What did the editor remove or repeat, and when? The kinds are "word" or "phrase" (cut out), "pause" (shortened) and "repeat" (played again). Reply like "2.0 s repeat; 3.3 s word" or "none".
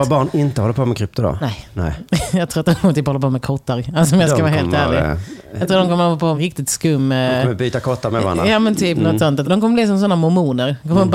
6.3 s word; 9.4 s phrase